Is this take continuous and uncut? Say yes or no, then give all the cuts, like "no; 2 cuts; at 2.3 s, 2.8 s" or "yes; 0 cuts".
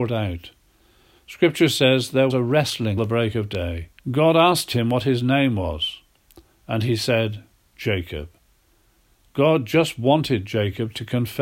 no; 3 cuts; at 2.3 s, 3.0 s, 4.0 s